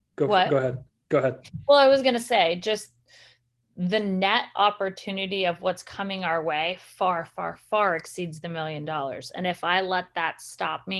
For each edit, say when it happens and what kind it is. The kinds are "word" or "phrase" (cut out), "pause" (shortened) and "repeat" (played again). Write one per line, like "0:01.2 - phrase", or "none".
none